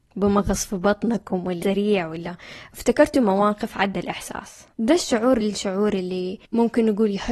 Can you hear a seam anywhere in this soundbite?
yes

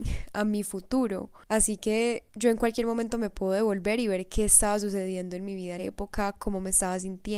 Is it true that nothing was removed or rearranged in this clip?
no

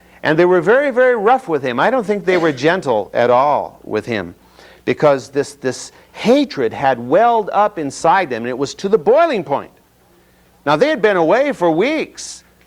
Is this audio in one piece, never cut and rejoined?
yes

